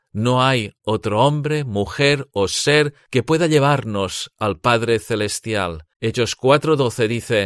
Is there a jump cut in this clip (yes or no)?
yes